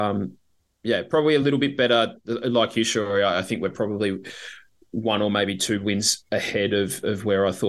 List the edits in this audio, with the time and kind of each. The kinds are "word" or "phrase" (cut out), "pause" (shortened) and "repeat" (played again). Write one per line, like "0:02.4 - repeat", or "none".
none